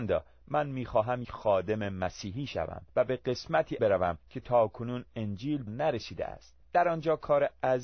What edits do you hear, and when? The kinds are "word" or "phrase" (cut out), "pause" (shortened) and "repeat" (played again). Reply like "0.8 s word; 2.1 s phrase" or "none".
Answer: 1.2 s word; 2.9 s pause; 3.8 s phrase; 4.2 s pause; 5.7 s word; 6.6 s pause